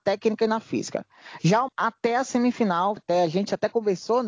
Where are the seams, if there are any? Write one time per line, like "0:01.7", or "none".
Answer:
0:01.7
0:03.0